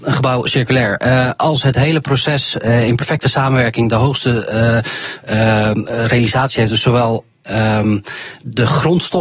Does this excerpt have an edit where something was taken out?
no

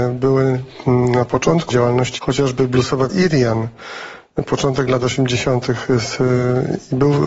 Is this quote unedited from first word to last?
no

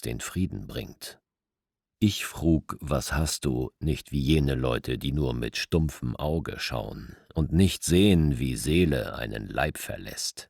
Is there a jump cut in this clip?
no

